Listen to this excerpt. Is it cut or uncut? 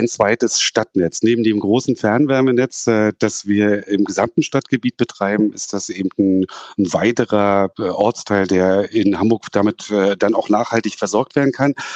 uncut